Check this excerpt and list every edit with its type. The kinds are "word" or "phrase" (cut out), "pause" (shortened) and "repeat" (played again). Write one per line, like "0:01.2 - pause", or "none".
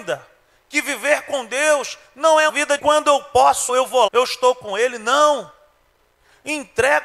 0:02.5 - word
0:02.8 - word
0:03.7 - word
0:04.1 - word